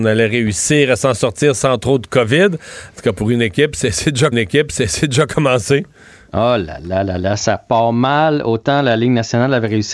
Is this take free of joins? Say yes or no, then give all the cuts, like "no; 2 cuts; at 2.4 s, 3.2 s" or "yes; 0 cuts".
no; 1 cut; at 4.3 s